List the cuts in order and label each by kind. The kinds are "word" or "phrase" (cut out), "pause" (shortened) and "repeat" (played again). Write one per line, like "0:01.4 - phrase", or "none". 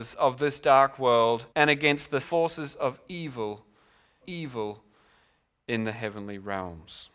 0:01.5 - pause
0:02.2 - word
0:04.2 - repeat